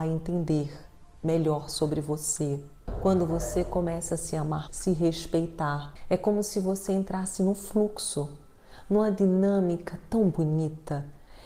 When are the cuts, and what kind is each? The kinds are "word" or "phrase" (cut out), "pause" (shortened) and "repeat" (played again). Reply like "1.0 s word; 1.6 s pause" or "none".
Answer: 4.7 s word